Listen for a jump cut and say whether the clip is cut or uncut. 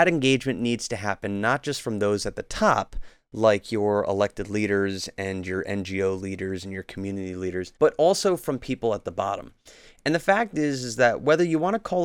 cut